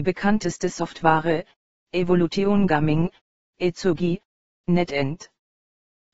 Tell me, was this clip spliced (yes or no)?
no